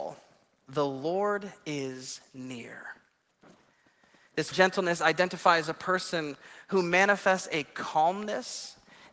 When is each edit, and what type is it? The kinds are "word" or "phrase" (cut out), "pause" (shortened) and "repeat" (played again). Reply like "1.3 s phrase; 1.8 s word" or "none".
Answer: 4.5 s word